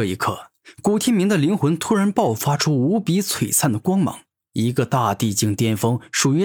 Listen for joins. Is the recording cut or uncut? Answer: uncut